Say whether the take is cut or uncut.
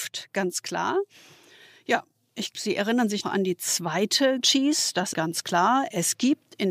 cut